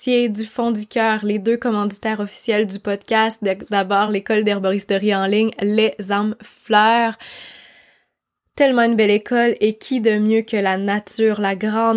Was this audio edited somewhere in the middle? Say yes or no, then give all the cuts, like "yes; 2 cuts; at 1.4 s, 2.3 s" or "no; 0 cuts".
no; 0 cuts